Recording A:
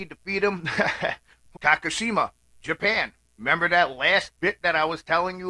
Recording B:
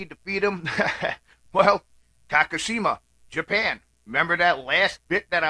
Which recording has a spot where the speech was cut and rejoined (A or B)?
A